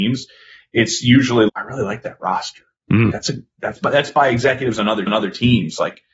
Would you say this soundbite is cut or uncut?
cut